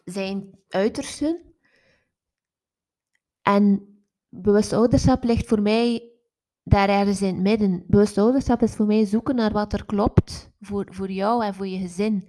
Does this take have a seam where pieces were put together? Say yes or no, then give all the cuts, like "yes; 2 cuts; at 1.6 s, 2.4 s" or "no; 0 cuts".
no; 0 cuts